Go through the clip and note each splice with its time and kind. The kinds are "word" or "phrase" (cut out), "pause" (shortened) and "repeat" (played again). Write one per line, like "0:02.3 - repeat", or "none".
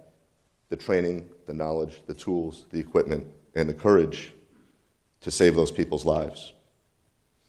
none